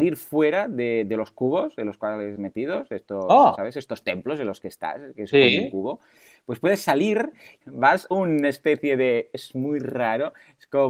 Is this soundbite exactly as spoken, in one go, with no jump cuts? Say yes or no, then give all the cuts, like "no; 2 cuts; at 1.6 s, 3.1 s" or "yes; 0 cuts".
no; 3 cuts; at 2.3 s, 7.6 s, 8.1 s